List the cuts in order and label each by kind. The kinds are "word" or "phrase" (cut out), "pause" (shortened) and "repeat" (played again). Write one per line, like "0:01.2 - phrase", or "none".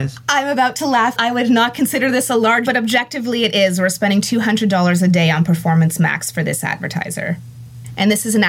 0:01.2 - word
0:02.7 - word